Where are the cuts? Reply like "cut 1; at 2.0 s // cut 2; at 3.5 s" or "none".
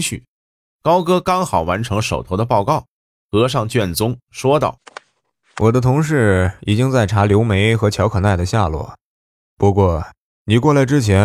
none